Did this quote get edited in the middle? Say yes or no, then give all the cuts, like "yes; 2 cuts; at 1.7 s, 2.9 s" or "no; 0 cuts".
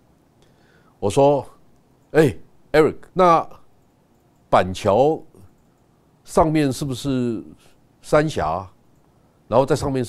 yes; 1 cut; at 3.1 s